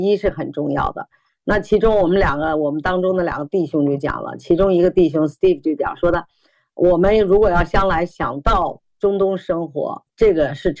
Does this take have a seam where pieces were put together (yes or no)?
no